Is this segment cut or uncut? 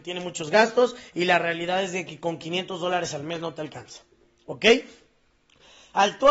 uncut